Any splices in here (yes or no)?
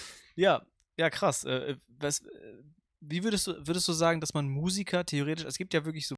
no